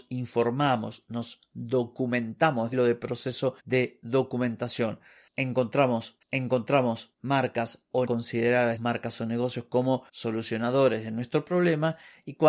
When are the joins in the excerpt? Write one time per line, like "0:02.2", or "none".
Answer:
0:02.7
0:03.6
0:06.2
0:08.1
0:08.8
0:10.1